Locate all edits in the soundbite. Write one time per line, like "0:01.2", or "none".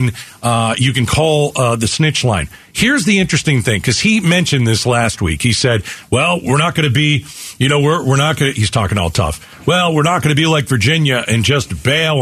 none